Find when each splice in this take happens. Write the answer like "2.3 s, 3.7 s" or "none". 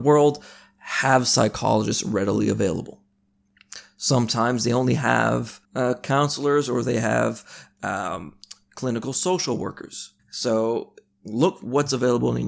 5.6 s, 10.2 s